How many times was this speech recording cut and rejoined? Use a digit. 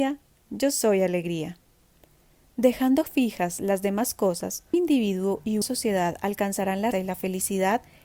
3